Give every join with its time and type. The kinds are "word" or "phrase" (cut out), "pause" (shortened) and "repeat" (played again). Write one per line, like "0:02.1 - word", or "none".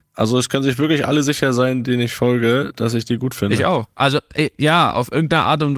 none